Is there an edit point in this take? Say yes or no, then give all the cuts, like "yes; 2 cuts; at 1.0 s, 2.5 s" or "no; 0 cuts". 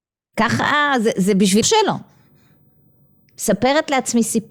yes; 2 cuts; at 1.1 s, 1.6 s